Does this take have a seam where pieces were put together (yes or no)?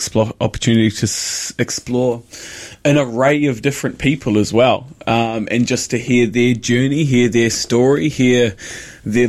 no